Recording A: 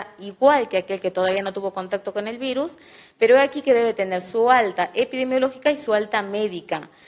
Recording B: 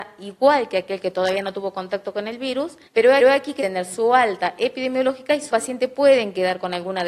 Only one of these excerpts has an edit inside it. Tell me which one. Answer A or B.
B